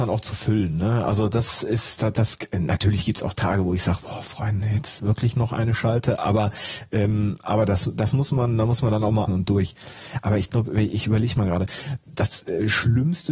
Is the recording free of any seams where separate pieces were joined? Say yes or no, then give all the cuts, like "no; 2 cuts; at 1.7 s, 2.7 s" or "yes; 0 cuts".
no; 1 cut; at 9.3 s